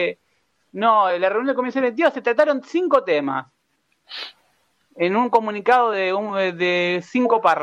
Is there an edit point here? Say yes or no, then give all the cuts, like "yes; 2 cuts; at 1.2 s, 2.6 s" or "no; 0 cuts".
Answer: no; 0 cuts